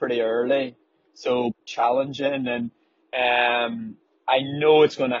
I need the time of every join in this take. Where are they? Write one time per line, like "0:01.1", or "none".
0:01.5